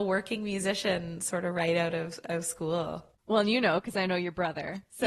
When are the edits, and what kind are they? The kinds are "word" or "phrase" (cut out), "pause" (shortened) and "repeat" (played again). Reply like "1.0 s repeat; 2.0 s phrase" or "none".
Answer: 3.2 s pause